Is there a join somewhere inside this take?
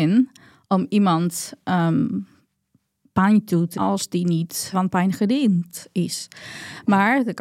yes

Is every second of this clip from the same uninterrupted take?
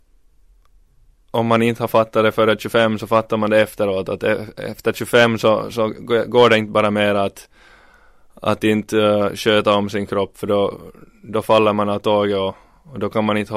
yes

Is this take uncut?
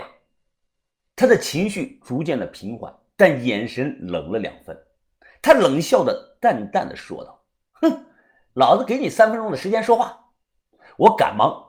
no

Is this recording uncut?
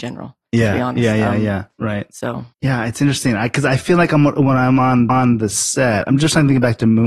no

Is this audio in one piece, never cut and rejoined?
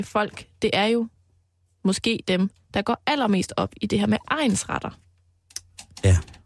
yes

